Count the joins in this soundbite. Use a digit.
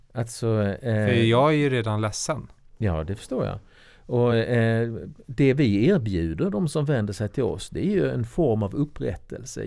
0